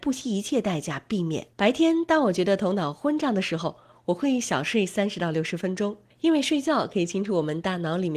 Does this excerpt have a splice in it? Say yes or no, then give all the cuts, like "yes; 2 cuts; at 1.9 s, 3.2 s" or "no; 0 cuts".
yes; 1 cut; at 1.5 s